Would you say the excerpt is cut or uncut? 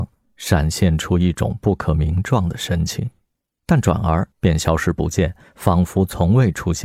cut